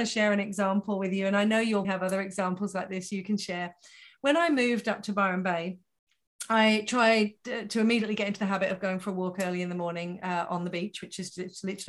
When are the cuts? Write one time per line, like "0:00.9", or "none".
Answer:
0:01.8

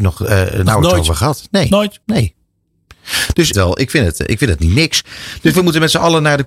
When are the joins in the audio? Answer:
0:02.0
0:03.5

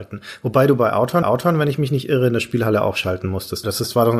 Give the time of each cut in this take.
0:01.2

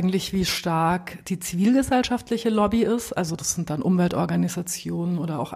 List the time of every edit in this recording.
none

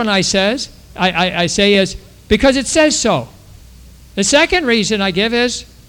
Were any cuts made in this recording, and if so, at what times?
none

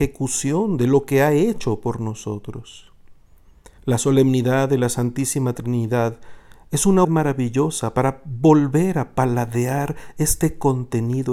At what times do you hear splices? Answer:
0:03.8
0:07.0

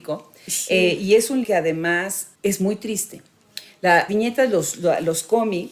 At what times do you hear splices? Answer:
0:01.4
0:02.3
0:04.1

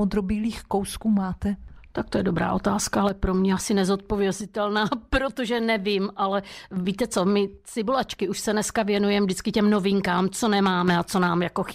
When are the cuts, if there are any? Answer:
none

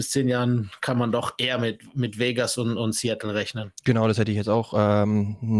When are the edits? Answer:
0:03.7

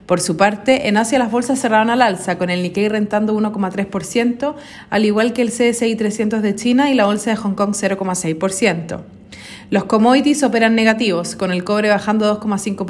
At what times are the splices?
none

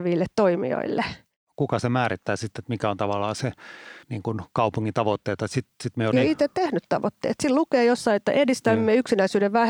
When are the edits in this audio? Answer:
0:04.0
0:06.1

